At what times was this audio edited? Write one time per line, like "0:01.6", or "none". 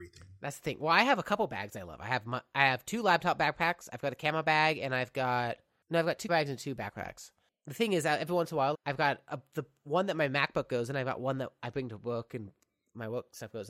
0:06.3
0:08.7